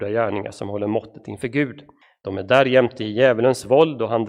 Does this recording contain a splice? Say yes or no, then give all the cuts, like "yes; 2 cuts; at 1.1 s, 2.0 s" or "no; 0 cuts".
yes; 1 cut; at 2.0 s